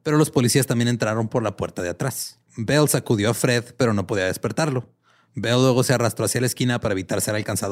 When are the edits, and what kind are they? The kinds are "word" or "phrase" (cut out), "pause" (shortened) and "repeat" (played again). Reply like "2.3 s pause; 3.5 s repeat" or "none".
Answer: 2.5 s pause